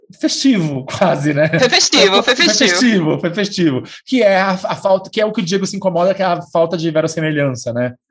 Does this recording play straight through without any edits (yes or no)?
yes